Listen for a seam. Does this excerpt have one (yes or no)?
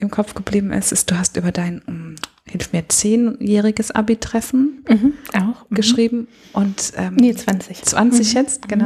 no